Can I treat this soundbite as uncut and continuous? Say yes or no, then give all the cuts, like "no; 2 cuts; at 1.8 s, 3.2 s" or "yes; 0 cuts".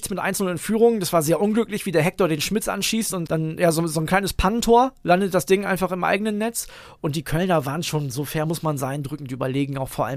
no; 1 cut; at 3.3 s